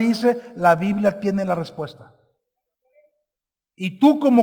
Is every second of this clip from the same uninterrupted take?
yes; 0 cuts

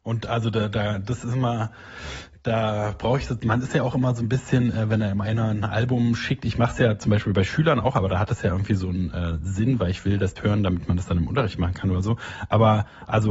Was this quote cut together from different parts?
yes; 1 cut; at 10.4 s

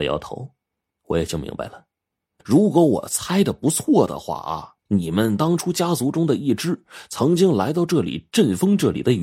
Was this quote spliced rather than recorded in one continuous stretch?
yes; 2 cuts; at 2.4 s, 4.8 s

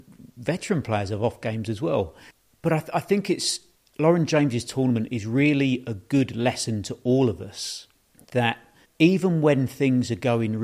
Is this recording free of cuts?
yes; 0 cuts

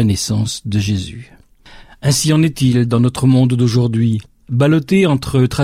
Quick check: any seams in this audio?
no; 0 cuts

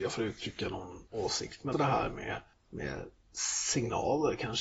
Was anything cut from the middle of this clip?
yes; 3 cuts; at 1.1 s, 1.7 s, 2.5 s

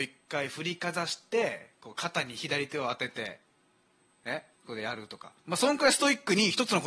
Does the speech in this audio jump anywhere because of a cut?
yes; 2 cuts; at 4.5 s, 5.4 s

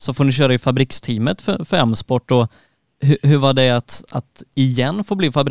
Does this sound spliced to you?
no; 0 cuts

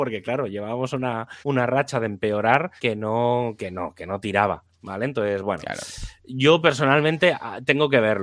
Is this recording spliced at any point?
yes; 2 cuts; at 1.4 s, 2.8 s

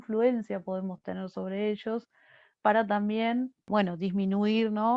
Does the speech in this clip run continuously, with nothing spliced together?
yes; 0 cuts

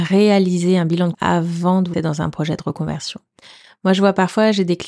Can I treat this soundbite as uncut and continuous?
no; 2 cuts; at 1.1 s, 1.9 s

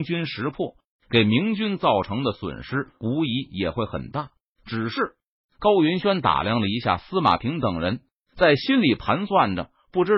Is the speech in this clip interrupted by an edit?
no; 0 cuts

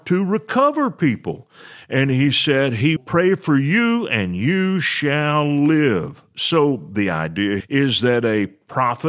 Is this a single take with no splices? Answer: no; 2 cuts; at 3.0 s, 7.6 s

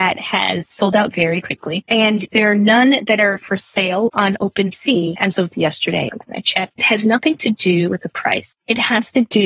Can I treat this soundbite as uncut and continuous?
yes; 0 cuts

